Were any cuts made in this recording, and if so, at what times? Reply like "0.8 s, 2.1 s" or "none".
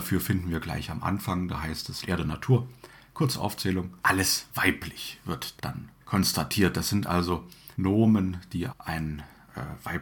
2.0 s, 4.0 s, 5.6 s, 6.0 s, 7.7 s, 8.7 s